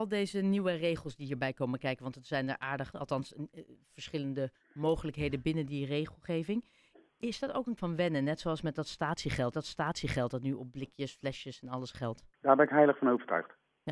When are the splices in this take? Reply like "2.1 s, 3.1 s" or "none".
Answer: 2.9 s, 7.8 s, 9.5 s, 12.3 s